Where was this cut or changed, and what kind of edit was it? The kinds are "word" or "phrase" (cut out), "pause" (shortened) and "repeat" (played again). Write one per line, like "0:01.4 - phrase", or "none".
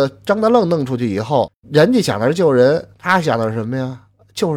0:01.5 - word
0:02.9 - pause